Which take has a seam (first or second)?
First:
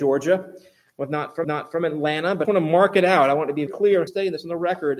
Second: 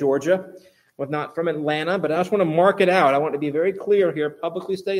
first